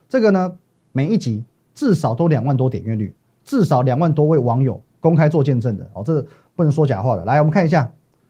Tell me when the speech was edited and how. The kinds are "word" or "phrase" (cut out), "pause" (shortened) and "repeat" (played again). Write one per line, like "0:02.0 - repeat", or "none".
none